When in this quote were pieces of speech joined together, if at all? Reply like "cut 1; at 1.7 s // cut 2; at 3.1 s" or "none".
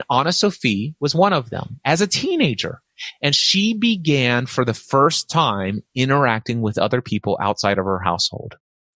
none